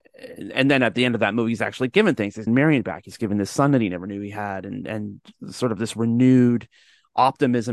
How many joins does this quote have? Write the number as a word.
one